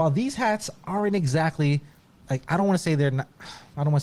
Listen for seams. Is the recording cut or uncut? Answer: uncut